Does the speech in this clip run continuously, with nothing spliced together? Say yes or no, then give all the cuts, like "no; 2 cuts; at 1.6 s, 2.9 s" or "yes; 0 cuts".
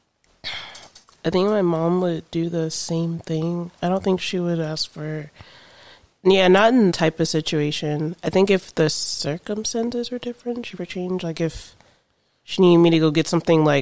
no; 2 cuts; at 6.9 s, 10.8 s